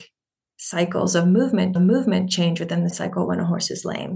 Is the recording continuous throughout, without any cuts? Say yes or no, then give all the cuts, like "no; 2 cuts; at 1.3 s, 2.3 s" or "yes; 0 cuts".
no; 2 cuts; at 1.8 s, 2.9 s